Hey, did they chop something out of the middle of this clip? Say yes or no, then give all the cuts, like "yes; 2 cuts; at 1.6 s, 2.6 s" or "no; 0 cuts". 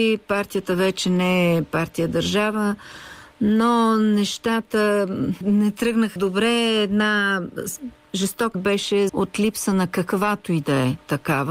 yes; 4 cuts; at 5.4 s, 6.2 s, 8.5 s, 9.1 s